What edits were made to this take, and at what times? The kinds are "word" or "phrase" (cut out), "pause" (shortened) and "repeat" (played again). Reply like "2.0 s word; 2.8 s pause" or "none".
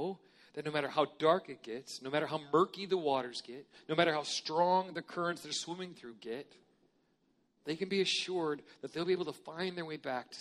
none